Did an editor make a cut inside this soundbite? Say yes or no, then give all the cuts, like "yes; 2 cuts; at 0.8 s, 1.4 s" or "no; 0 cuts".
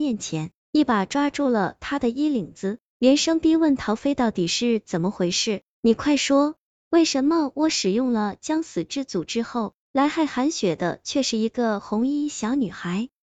no; 0 cuts